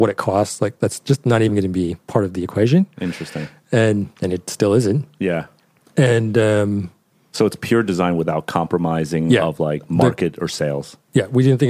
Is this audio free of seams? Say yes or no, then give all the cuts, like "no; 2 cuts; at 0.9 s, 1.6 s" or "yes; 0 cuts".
yes; 0 cuts